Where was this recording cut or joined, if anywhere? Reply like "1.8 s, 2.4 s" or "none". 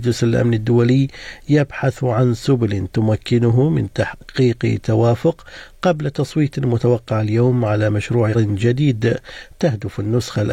8.3 s